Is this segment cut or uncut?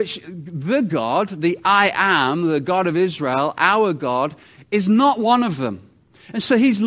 uncut